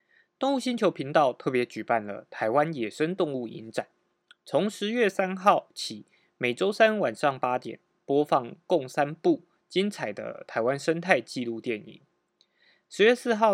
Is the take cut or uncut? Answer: uncut